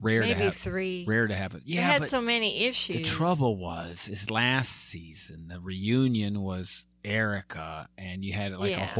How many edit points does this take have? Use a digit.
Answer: 0